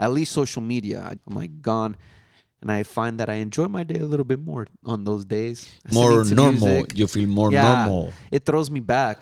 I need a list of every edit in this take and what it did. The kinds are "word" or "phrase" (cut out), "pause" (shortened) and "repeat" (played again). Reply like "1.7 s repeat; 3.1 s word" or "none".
1.2 s word; 5.9 s phrase